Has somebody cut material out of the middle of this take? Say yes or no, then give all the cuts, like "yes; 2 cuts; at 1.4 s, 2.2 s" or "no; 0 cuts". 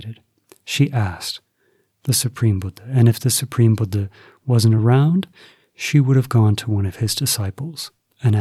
no; 0 cuts